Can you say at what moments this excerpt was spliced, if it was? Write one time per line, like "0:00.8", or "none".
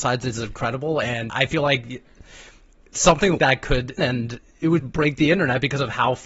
0:01.3
0:03.4
0:04.0
0:04.8